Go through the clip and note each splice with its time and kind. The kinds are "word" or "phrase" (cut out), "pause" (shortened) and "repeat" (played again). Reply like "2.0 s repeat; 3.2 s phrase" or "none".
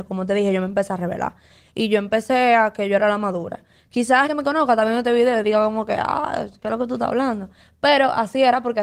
4.3 s word